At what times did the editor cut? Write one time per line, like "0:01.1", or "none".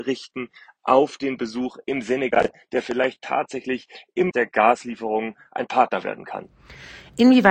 0:03.2
0:04.3